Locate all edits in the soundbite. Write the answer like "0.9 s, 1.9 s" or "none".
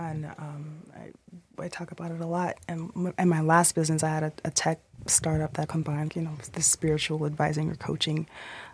5.6 s, 6.1 s